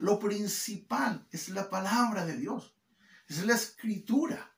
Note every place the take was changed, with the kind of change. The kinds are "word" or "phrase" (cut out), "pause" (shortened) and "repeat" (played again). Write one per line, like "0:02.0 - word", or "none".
none